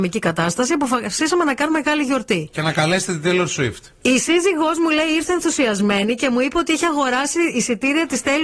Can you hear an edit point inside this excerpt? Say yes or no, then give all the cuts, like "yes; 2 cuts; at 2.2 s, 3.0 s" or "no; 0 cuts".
yes; 1 cut; at 1.7 s